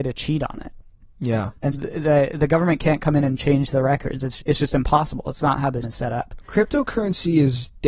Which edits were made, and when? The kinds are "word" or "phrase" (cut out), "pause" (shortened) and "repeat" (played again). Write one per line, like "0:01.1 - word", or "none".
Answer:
0:01.7 - word
0:04.4 - word
0:05.8 - word